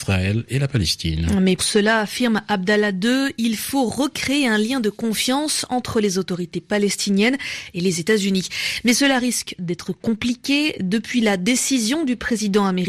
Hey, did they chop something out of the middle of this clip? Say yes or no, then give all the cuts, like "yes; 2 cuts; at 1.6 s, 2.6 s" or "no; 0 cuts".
yes; 1 cut; at 1.6 s